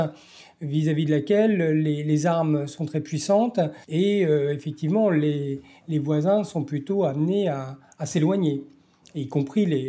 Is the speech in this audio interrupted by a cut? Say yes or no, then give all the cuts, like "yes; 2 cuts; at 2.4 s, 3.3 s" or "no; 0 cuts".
yes; 1 cut; at 3.8 s